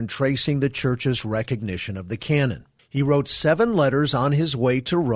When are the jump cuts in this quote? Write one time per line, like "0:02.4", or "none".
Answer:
0:02.8